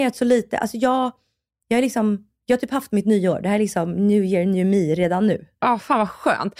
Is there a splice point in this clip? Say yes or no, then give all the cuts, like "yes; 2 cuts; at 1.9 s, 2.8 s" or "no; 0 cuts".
no; 0 cuts